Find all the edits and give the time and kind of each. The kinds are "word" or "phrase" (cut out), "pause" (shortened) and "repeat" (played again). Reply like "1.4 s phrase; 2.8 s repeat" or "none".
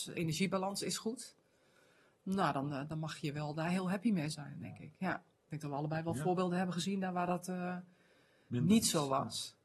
none